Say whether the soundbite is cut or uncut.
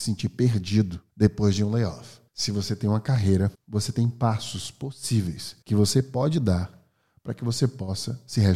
cut